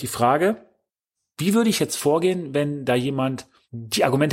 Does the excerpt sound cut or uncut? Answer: uncut